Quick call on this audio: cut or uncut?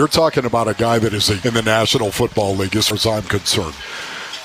cut